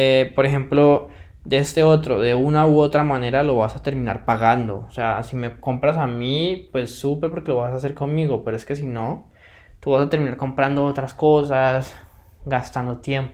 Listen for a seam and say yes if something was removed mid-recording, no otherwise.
no